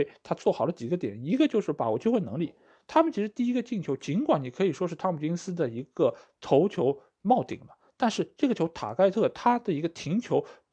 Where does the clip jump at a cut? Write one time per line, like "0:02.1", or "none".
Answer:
none